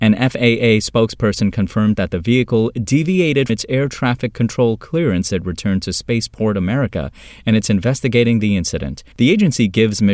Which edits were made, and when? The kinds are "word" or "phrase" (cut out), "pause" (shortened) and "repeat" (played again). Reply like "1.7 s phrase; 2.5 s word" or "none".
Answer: 1.9 s phrase; 3.5 s word; 5.3 s word; 9.1 s pause